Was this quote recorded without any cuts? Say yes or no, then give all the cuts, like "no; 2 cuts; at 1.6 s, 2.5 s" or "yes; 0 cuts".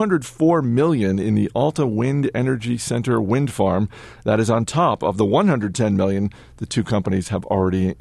yes; 0 cuts